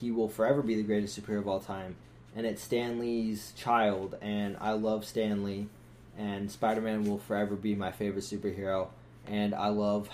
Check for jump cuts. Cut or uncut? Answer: uncut